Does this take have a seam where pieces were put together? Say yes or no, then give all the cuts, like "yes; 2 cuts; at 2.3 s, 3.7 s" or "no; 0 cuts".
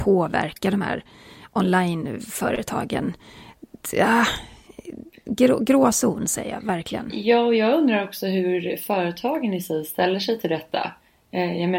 no; 0 cuts